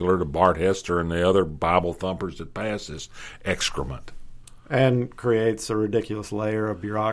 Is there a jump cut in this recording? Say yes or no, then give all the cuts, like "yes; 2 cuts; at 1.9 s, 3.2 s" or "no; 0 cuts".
no; 0 cuts